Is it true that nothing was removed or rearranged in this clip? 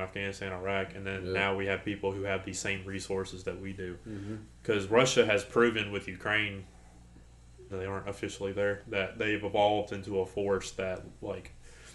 no; 1 cut; at 7.7 s

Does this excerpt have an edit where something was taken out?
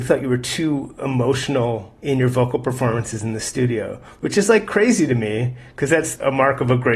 yes; 1 cut; at 2.0 s

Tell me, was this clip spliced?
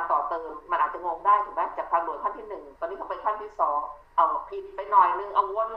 yes; 2 cuts; at 2.8 s, 4.0 s

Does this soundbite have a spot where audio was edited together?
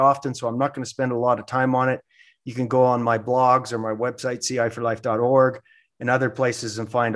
no; 0 cuts

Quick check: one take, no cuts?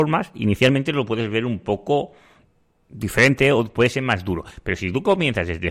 yes; 0 cuts

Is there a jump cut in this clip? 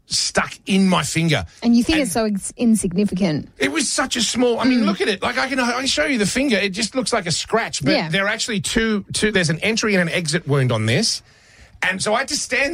no; 0 cuts

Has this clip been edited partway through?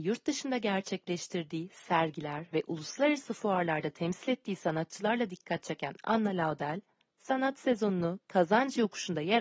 no; 0 cuts

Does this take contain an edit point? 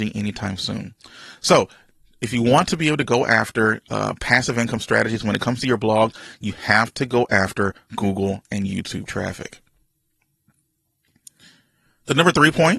no; 0 cuts

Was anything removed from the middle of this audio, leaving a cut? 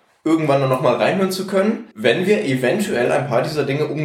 yes; 1 cut; at 1.9 s

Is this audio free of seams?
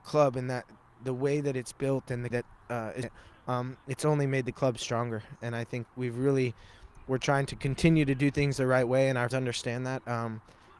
no; 5 cuts; at 2.3 s, 2.6 s, 3.0 s, 5.8 s, 9.3 s

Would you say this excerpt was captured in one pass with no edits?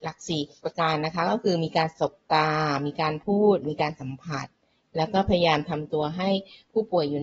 yes; 0 cuts

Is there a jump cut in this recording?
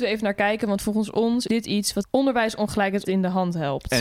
yes; 3 cuts; at 1.5 s, 2.0 s, 3.0 s

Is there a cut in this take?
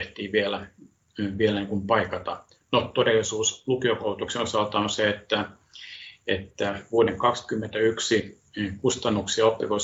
no; 0 cuts

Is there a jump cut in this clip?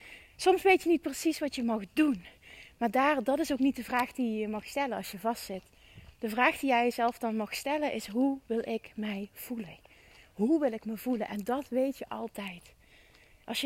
no; 0 cuts

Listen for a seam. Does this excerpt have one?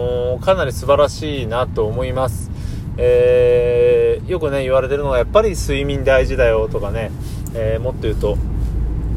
no; 0 cuts

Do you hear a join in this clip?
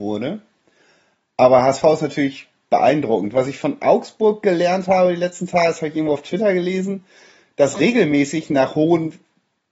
no; 0 cuts

